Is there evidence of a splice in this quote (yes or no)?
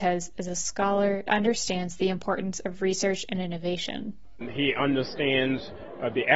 yes